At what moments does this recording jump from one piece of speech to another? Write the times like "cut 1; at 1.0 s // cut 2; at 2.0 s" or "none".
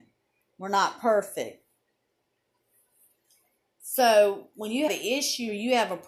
cut 1; at 4.9 s